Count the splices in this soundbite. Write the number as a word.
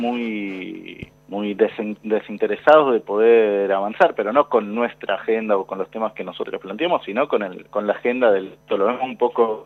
three